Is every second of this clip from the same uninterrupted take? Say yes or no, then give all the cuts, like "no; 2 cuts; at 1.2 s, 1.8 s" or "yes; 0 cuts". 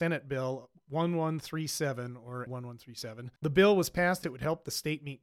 no; 3 cuts; at 2.5 s, 3.4 s, 4.2 s